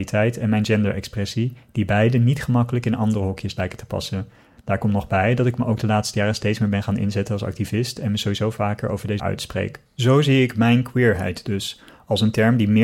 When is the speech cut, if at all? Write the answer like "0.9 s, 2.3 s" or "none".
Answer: 9.2 s, 9.9 s